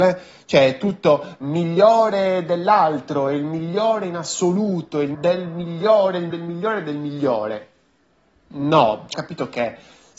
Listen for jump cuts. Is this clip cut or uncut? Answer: cut